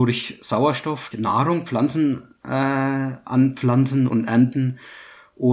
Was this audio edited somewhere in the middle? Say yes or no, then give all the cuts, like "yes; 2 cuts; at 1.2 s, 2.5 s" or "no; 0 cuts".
yes; 2 cuts; at 1.1 s, 4.1 s